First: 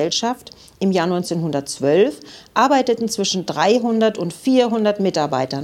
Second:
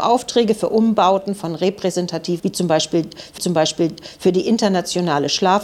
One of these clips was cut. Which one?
second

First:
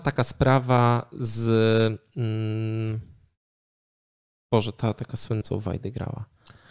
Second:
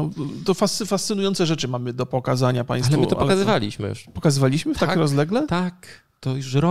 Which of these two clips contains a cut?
first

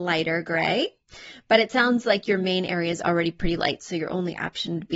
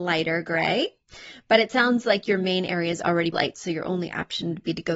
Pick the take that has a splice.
second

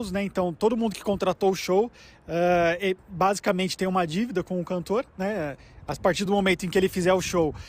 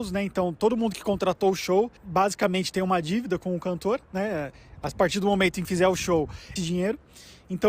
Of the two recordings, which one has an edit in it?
second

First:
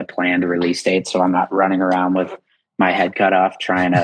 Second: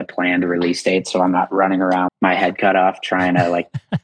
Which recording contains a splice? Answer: second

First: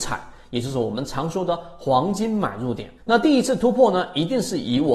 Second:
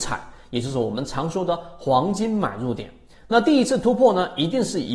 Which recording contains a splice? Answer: first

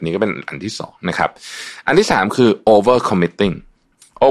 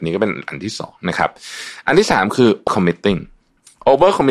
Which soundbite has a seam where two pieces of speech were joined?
second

